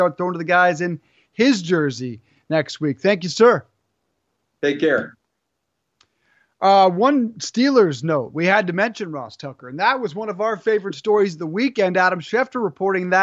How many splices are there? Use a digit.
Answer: 0